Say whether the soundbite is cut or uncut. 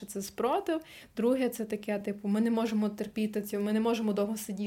uncut